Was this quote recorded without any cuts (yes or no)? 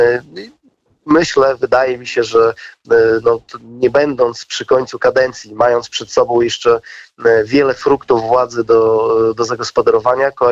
yes